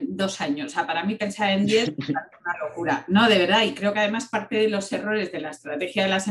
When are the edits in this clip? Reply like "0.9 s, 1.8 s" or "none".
none